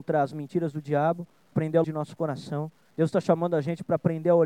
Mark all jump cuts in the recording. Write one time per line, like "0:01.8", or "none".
0:01.5
0:01.8
0:02.9